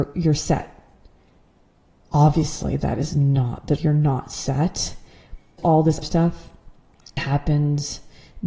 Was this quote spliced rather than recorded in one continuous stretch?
yes; 4 cuts; at 3.8 s, 5.6 s, 6.0 s, 7.2 s

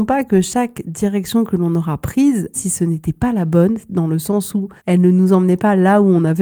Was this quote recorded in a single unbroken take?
no; 2 cuts; at 2.5 s, 4.8 s

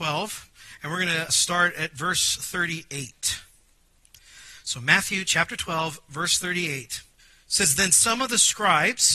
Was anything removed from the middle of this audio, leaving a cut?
yes; 2 cuts; at 1.3 s, 7.2 s

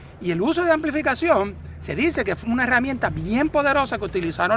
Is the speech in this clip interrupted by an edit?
yes; 1 cut; at 2.4 s

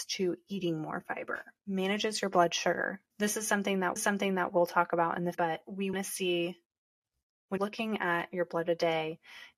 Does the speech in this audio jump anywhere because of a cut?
yes; 7 cuts; at 1.6 s, 3.1 s, 4.0 s, 5.3 s, 5.9 s, 7.6 s, 8.7 s

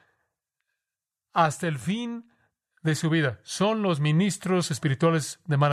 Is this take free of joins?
yes; 0 cuts

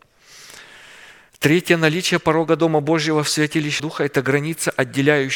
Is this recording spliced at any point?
yes; 2 cuts; at 1.3 s, 3.8 s

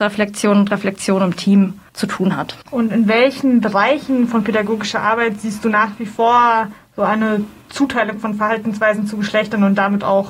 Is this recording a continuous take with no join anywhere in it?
no; 2 cuts; at 1.9 s, 2.6 s

